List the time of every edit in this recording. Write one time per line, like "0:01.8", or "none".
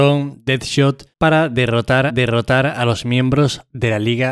0:01.1
0:02.1